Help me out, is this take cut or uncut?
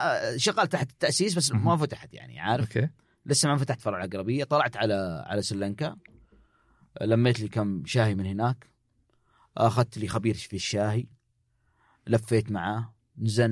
uncut